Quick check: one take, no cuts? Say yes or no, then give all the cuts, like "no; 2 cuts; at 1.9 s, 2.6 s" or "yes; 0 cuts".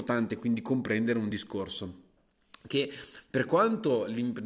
yes; 0 cuts